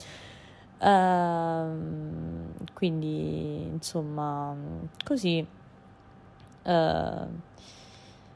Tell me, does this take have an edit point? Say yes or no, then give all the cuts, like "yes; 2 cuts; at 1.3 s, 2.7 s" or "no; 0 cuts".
no; 0 cuts